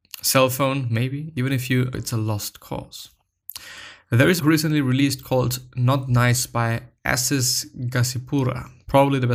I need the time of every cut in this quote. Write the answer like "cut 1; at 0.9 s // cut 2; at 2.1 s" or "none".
cut 1; at 1.9 s // cut 2; at 4.4 s